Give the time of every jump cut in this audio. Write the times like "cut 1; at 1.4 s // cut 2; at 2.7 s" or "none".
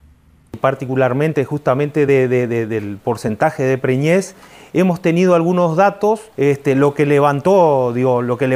cut 1; at 6.3 s